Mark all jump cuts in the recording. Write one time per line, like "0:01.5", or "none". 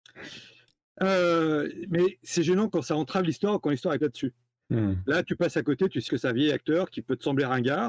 0:04.0
0:06.1